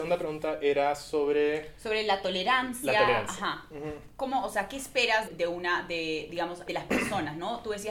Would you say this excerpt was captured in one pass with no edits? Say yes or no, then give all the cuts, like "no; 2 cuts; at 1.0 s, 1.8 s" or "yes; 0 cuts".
no; 2 cuts; at 5.3 s, 6.7 s